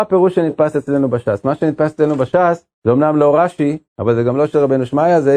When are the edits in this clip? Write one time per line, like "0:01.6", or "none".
0:02.7
0:03.9